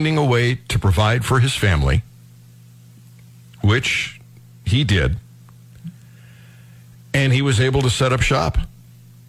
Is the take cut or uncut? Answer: uncut